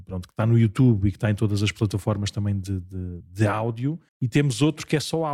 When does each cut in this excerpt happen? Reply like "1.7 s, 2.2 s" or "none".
3.2 s, 4.1 s